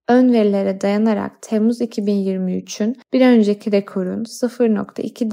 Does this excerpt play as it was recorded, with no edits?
no; 1 cut; at 3.0 s

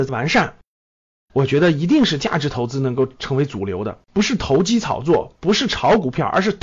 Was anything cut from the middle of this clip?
yes; 1 cut; at 4.0 s

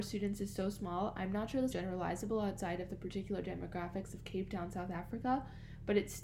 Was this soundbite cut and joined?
yes; 1 cut; at 1.7 s

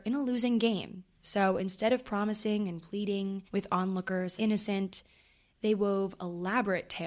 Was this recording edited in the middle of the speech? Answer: yes; 2 cuts; at 3.5 s, 4.4 s

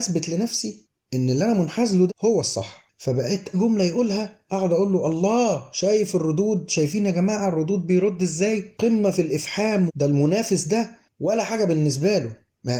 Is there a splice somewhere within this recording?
yes; 3 cuts; at 2.1 s, 3.5 s, 9.9 s

